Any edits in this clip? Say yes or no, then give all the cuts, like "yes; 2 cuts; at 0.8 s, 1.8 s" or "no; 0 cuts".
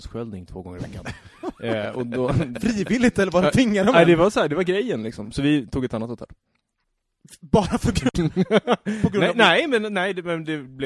no; 0 cuts